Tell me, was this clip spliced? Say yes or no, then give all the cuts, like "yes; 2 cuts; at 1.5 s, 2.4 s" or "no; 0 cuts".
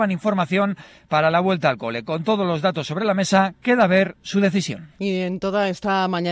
no; 0 cuts